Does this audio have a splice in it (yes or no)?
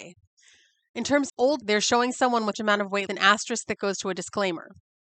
yes